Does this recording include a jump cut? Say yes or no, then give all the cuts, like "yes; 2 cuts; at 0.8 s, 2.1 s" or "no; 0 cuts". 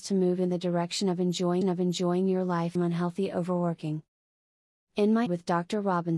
yes; 3 cuts; at 1.6 s, 2.7 s, 5.3 s